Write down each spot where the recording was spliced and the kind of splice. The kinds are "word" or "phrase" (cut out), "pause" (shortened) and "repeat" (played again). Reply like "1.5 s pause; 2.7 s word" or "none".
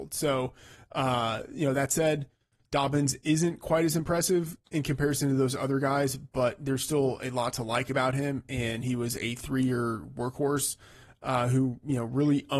none